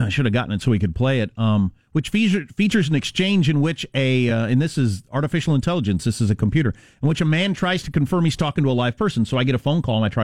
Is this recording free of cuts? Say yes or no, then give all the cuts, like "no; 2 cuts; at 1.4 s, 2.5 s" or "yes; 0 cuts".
yes; 0 cuts